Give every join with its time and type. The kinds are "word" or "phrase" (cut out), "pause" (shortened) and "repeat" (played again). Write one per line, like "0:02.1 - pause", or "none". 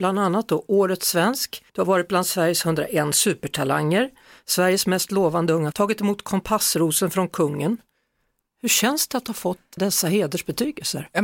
0:01.7 - pause
0:05.7 - word
0:09.8 - word